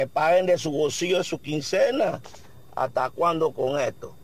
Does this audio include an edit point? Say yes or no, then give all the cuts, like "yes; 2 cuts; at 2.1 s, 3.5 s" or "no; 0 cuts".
no; 0 cuts